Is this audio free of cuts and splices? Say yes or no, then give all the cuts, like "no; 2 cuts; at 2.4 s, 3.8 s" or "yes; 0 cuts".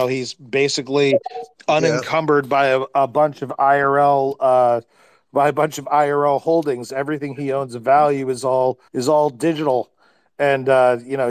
no; 1 cut; at 8.9 s